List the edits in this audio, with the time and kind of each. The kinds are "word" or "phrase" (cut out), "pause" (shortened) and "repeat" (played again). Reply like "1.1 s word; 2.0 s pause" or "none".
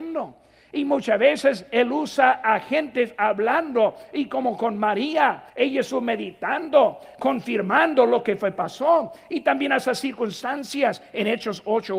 5.5 s pause